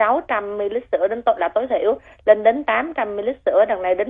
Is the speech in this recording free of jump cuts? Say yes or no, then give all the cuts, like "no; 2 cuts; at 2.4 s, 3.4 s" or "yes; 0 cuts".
yes; 0 cuts